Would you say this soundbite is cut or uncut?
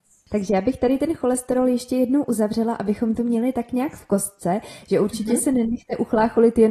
uncut